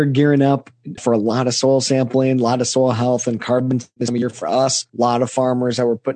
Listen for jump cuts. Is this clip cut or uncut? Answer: cut